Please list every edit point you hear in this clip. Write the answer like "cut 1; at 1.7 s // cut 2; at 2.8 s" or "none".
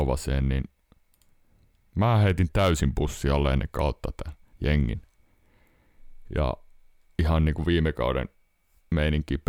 cut 1; at 4.5 s